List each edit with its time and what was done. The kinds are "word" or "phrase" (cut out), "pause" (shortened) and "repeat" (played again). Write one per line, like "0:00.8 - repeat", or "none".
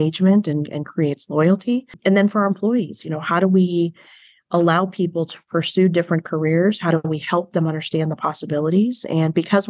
none